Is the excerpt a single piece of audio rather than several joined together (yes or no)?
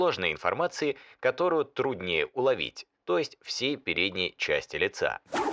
yes